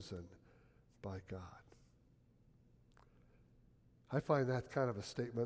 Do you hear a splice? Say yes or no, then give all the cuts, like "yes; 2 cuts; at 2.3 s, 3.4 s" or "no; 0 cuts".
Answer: no; 0 cuts